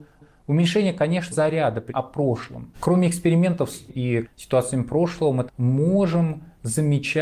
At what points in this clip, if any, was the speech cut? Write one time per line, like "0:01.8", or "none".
0:01.3
0:01.9
0:02.7
0:03.9
0:04.2
0:05.5